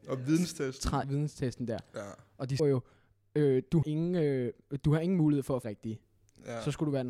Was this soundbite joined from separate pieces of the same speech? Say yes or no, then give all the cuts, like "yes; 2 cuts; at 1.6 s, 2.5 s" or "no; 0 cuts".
yes; 4 cuts; at 1.0 s, 2.6 s, 3.8 s, 5.6 s